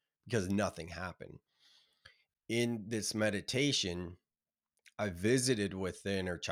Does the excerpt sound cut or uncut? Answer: uncut